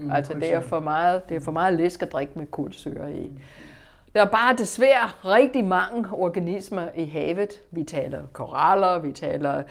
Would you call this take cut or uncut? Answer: uncut